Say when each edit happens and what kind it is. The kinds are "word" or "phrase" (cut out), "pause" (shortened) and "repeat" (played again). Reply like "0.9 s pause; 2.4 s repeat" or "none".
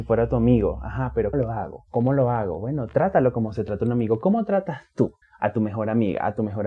1.3 s word; 5.2 s pause